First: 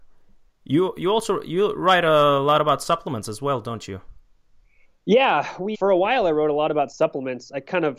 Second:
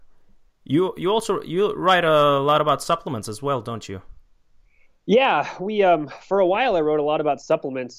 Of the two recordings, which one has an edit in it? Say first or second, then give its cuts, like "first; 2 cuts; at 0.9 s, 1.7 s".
first; 1 cut; at 5.7 s